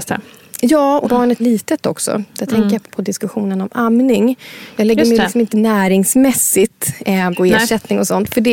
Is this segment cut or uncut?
cut